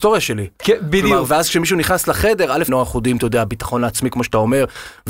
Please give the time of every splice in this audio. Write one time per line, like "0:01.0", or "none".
0:02.7